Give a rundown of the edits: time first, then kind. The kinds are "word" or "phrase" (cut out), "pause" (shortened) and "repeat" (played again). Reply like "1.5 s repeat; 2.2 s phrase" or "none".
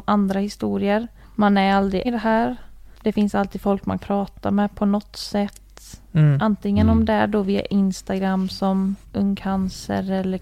1.2 s pause; 2.0 s word; 2.9 s pause; 4.0 s word